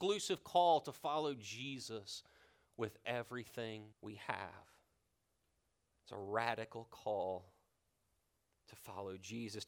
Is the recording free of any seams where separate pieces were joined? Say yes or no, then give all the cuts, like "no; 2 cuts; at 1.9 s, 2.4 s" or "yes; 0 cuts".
no; 1 cut; at 3.9 s